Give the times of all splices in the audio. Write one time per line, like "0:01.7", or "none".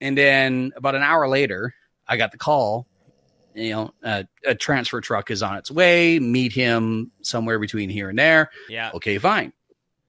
none